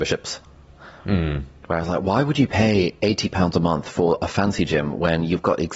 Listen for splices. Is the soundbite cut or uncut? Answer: cut